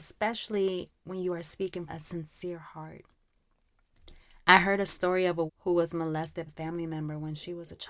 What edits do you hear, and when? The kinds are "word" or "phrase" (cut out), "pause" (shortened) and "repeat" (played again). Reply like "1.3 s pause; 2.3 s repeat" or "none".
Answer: 1.9 s word; 5.5 s word; 6.5 s word